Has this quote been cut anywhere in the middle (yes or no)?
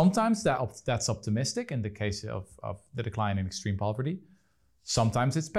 no